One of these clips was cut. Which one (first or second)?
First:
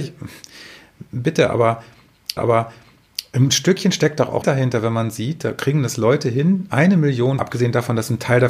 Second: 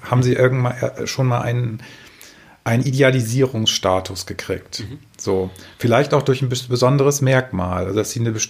first